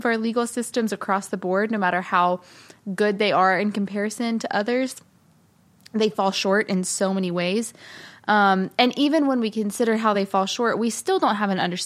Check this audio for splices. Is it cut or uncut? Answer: uncut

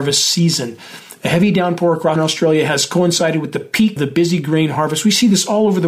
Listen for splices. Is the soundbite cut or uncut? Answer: cut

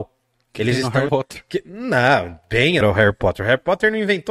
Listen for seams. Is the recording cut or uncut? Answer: cut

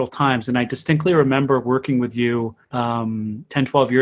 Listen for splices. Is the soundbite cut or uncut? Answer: cut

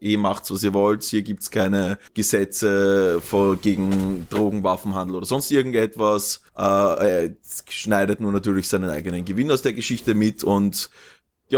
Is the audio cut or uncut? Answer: cut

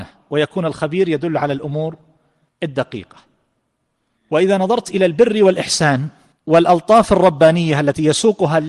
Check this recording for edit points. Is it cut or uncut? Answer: uncut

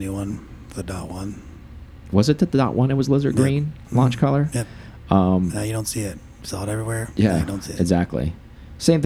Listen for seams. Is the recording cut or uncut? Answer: uncut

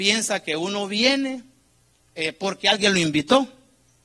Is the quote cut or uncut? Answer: uncut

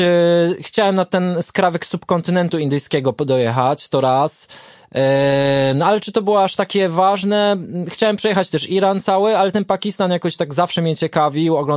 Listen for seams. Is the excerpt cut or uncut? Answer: uncut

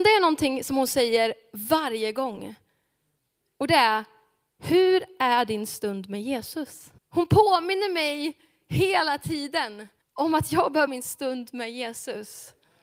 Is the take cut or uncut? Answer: cut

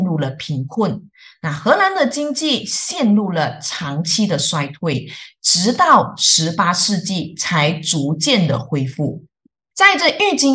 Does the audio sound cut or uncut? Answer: uncut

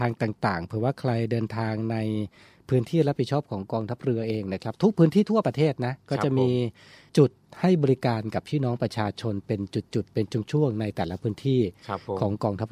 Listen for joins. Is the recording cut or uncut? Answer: uncut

